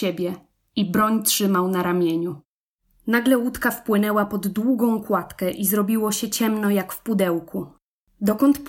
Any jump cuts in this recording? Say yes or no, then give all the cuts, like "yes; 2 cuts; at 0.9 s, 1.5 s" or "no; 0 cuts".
no; 0 cuts